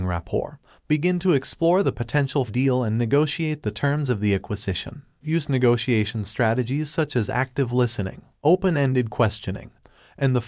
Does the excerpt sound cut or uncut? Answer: cut